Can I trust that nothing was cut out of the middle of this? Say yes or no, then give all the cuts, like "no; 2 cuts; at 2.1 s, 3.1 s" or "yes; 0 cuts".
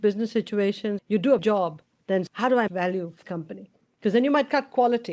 no; 5 cuts; at 1.0 s, 1.4 s, 2.3 s, 2.7 s, 3.2 s